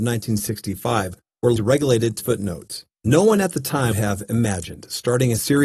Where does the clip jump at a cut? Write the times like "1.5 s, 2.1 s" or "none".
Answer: 1.6 s, 2.2 s, 2.9 s, 3.9 s